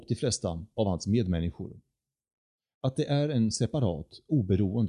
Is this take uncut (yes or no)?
yes